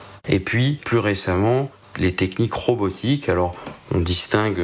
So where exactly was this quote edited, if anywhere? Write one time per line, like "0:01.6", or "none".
none